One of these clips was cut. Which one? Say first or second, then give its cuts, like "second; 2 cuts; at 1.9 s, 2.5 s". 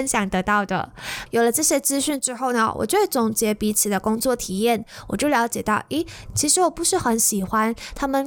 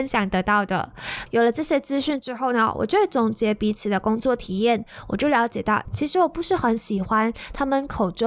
second; 1 cut; at 5.8 s